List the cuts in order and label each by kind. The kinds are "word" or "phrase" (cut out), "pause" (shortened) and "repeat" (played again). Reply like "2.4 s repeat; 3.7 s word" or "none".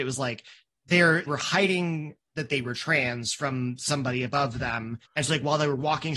1.3 s word; 5.0 s pause